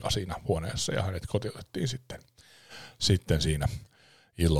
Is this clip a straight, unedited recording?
yes; 0 cuts

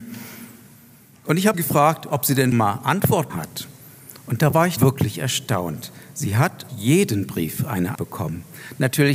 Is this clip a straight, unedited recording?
no; 6 cuts; at 1.5 s, 2.5 s, 3.3 s, 4.8 s, 6.7 s, 7.9 s

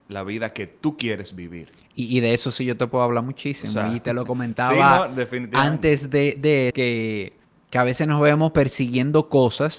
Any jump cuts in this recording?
yes; 2 cuts; at 6.7 s, 7.4 s

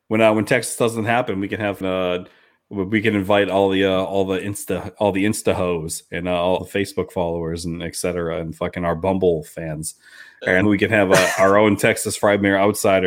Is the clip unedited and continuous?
no; 3 cuts; at 1.8 s, 6.6 s, 10.6 s

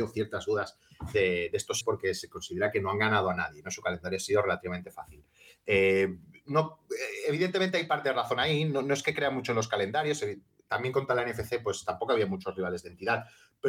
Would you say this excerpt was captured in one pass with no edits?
no; 1 cut; at 1.8 s

